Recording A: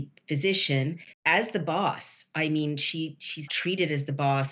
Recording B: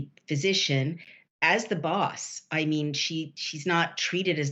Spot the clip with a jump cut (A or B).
A